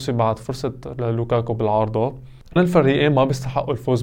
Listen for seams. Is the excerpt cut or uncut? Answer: cut